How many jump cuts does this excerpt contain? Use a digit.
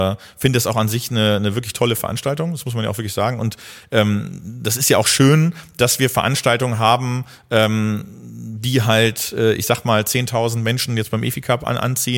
0